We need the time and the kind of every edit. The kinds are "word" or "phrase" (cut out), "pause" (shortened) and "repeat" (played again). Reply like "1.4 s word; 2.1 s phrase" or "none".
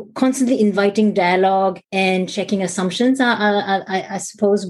1.8 s pause

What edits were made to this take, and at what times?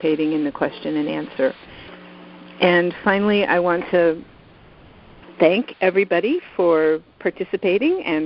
5.3 s word

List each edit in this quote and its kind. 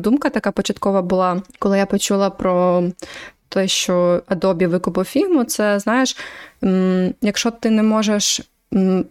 1.5 s pause

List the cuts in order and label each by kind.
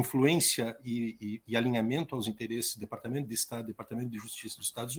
none

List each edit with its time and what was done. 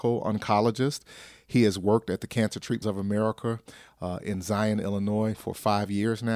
2.8 s word; 5.3 s word

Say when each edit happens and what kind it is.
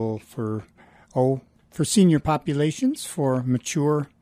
none

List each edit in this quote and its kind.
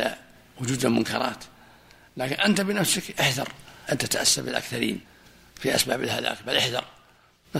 none

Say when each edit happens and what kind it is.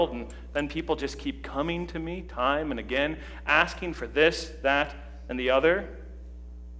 none

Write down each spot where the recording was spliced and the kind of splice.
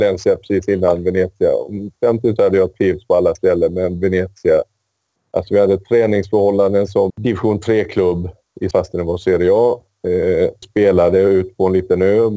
2.4 s word; 7.1 s word; 8.7 s word; 10.6 s word

